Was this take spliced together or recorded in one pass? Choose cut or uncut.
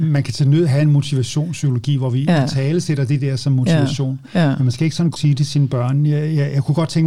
cut